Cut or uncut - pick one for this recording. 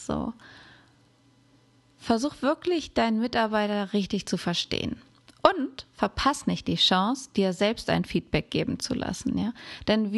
uncut